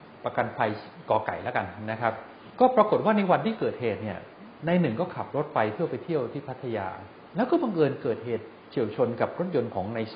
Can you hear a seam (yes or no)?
yes